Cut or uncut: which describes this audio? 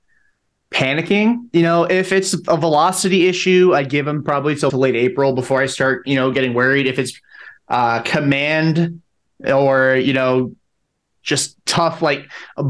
cut